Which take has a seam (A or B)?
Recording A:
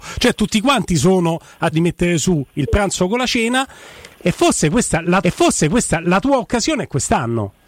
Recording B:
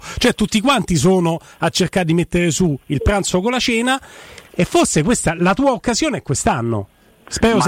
A